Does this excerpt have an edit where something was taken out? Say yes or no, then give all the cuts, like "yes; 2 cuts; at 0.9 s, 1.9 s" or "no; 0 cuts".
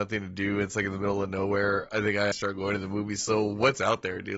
yes; 1 cut; at 2.3 s